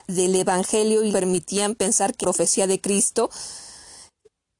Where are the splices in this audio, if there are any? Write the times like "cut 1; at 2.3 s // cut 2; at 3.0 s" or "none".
cut 1; at 1.1 s // cut 2; at 2.2 s